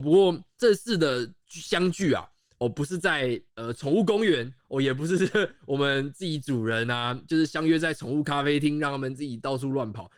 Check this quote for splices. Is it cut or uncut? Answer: cut